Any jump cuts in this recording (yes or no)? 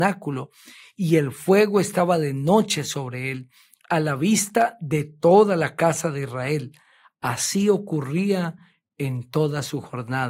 no